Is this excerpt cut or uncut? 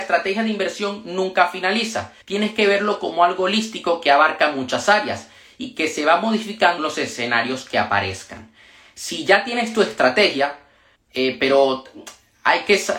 cut